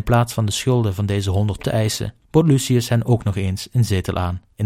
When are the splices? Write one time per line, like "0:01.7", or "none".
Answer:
0:01.6
0:02.2